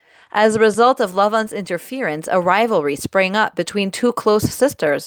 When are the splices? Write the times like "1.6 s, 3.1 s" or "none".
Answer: none